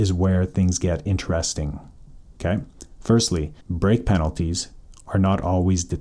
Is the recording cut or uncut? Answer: cut